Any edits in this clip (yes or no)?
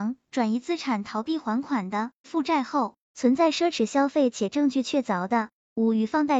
yes